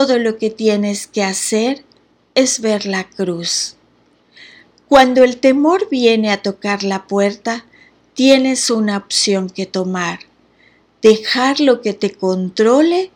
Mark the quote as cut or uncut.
uncut